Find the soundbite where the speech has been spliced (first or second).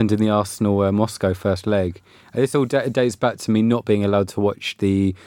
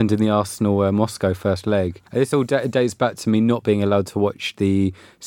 second